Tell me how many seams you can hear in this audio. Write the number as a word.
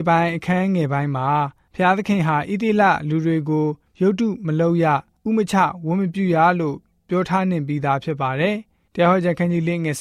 zero